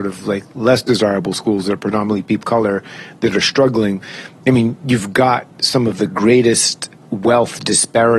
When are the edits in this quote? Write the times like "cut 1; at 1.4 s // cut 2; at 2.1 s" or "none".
cut 1; at 2.4 s